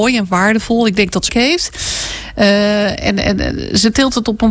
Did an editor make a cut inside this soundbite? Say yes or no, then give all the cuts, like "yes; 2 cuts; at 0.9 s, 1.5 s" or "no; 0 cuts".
yes; 1 cut; at 1.3 s